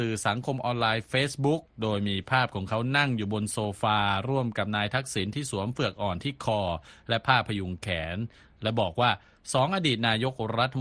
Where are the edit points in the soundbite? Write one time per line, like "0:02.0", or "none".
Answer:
none